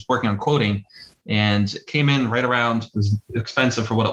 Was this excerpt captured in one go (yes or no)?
yes